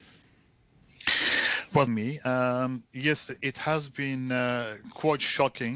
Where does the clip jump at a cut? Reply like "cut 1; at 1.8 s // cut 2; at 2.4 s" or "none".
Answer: cut 1; at 1.9 s